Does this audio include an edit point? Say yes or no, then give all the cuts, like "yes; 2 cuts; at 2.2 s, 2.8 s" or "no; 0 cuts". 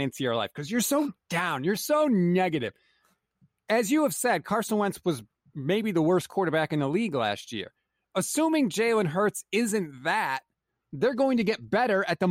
no; 0 cuts